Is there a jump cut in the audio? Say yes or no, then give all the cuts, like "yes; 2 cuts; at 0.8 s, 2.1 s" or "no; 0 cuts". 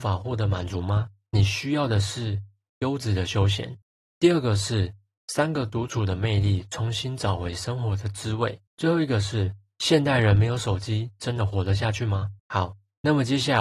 yes; 3 cuts; at 3.8 s, 8.7 s, 12.4 s